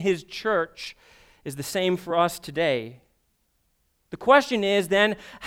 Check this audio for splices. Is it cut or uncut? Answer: uncut